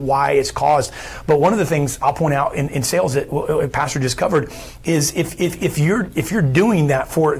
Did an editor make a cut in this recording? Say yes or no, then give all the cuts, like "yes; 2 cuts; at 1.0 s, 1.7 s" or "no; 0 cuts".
no; 0 cuts